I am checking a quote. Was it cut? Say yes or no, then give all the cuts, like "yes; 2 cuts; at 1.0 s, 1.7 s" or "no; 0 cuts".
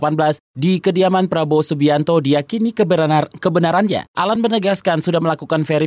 no; 0 cuts